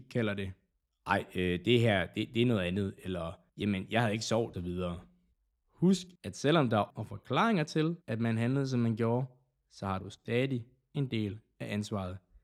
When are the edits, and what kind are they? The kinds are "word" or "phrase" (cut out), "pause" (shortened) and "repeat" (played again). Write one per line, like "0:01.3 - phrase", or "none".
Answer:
0:03.5 - pause
0:04.5 - phrase
0:06.2 - pause
0:06.9 - word
0:08.0 - pause